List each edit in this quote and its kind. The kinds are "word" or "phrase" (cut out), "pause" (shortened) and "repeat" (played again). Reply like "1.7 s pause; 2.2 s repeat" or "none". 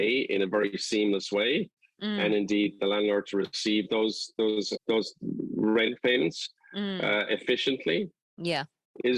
2.8 s word; 4.8 s word